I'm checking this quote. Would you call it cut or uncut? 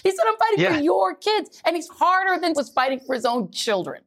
cut